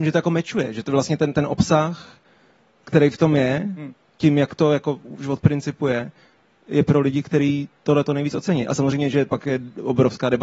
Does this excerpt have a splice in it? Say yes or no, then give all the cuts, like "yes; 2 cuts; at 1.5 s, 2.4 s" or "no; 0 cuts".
no; 0 cuts